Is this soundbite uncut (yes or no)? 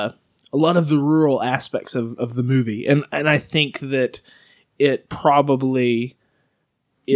yes